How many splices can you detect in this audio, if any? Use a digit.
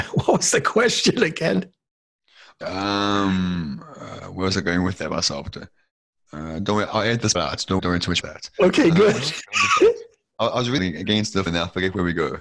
7